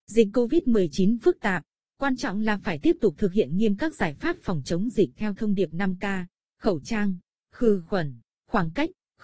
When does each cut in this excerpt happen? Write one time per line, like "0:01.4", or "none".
none